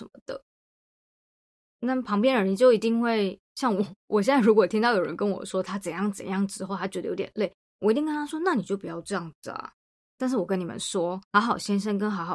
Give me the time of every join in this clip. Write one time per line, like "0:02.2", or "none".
0:11.2